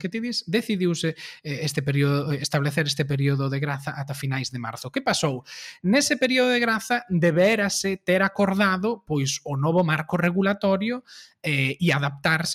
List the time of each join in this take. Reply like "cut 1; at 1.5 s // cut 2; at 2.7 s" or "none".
none